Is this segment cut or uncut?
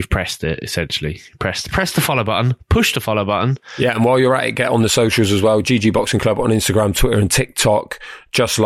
cut